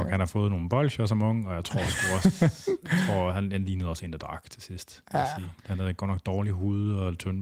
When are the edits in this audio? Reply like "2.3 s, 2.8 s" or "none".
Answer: 5.6 s